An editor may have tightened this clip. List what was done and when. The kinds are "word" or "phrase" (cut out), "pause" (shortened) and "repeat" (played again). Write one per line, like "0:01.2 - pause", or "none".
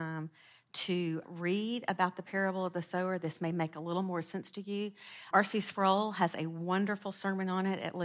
0:01.2 - word
0:05.3 - word